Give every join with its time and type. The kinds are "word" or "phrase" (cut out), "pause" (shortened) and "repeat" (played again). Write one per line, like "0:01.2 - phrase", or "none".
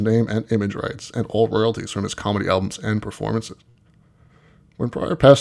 none